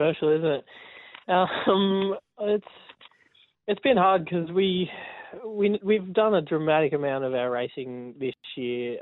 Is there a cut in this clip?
no; 0 cuts

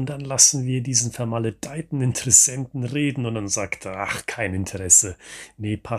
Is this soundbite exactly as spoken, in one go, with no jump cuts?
yes; 0 cuts

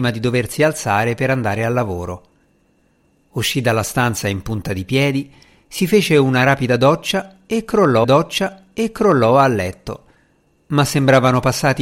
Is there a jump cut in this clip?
yes; 1 cut; at 8.0 s

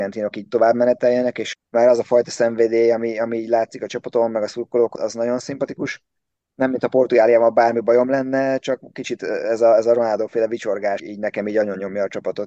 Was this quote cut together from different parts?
yes; 3 cuts; at 1.5 s, 5.0 s, 11.0 s

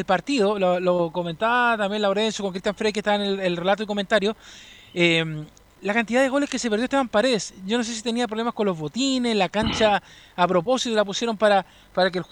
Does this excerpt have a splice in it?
no; 0 cuts

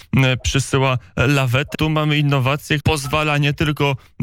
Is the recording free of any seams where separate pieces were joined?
no; 2 cuts; at 1.7 s, 2.8 s

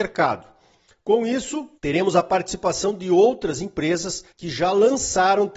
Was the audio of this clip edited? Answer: yes; 2 cuts; at 1.8 s, 4.3 s

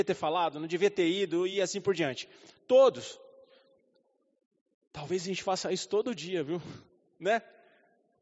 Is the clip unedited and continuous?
yes; 0 cuts

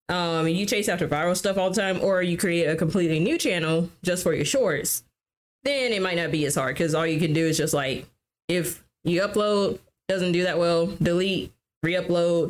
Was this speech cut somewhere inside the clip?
no; 0 cuts

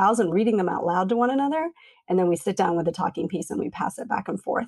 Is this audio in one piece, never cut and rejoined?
yes; 0 cuts

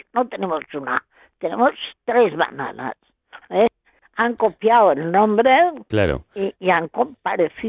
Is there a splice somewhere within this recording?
no; 0 cuts

